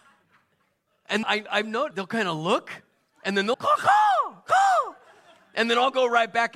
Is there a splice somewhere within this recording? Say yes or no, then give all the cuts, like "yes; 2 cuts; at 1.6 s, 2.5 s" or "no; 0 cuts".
yes; 3 cuts; at 1.2 s, 1.9 s, 3.5 s